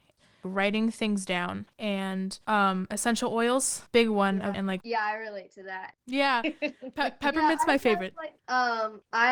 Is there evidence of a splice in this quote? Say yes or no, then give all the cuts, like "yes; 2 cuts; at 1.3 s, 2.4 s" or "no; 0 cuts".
yes; 4 cuts; at 1.7 s, 3.9 s, 4.5 s, 8.4 s